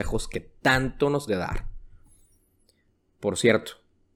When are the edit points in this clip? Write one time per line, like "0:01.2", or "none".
0:01.3